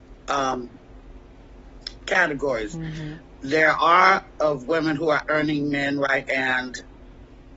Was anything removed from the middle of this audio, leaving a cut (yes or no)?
yes